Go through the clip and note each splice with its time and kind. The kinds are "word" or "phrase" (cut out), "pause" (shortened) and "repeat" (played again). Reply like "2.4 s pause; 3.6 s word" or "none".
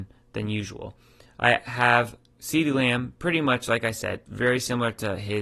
none